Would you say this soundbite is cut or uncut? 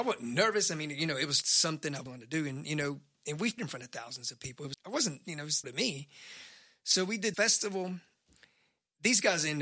cut